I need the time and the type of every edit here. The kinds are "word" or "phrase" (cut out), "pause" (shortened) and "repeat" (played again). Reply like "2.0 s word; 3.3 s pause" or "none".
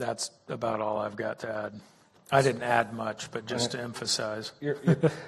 none